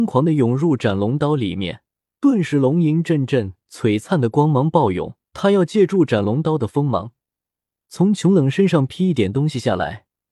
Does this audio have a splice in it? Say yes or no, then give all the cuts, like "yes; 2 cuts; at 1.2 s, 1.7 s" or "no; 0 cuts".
yes; 2 cuts; at 2.0 s, 5.3 s